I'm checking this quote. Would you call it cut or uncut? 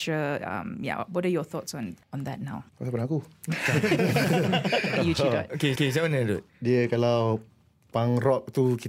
cut